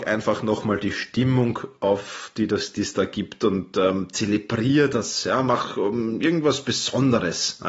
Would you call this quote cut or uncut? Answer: uncut